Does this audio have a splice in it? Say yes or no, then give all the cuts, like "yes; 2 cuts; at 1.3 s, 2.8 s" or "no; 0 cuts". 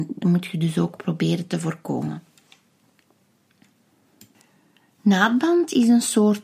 no; 0 cuts